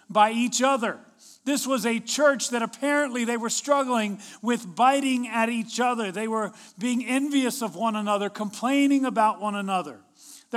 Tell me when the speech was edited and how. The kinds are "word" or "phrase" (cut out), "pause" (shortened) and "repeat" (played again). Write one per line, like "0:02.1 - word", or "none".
none